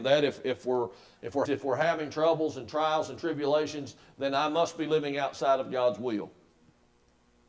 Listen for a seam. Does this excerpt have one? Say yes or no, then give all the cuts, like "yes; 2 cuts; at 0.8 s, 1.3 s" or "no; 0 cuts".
yes; 1 cut; at 1.5 s